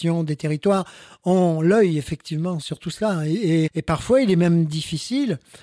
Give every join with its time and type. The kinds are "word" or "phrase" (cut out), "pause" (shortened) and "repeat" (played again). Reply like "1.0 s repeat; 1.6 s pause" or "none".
2.6 s word; 3.7 s word